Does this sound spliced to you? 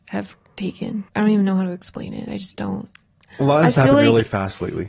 yes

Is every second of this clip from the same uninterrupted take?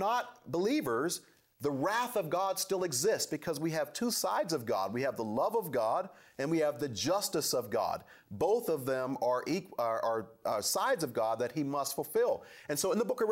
yes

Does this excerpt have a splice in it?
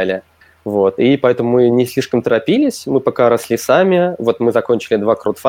no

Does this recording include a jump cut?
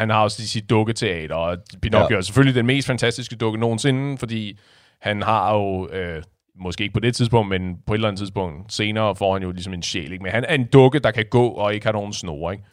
no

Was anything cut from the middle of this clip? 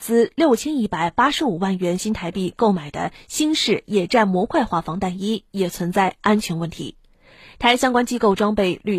no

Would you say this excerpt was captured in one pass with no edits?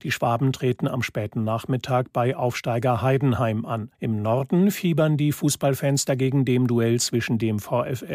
no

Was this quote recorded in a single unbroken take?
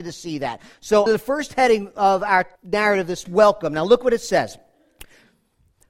no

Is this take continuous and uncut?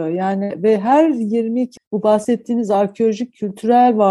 no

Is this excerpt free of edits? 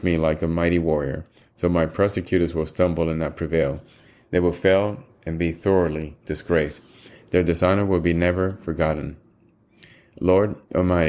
yes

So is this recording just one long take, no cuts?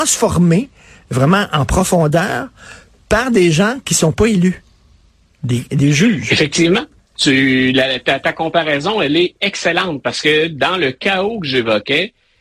yes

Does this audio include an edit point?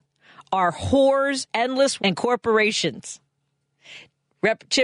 yes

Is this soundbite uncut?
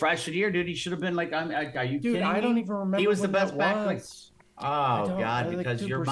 yes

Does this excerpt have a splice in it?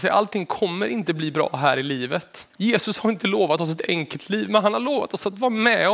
yes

